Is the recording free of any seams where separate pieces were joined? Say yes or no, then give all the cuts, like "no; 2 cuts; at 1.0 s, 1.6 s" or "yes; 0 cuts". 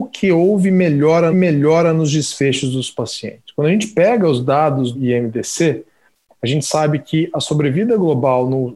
no; 2 cuts; at 1.3 s, 4.9 s